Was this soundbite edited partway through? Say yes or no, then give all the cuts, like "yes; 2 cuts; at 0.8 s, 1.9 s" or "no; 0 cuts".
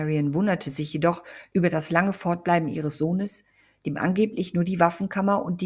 no; 0 cuts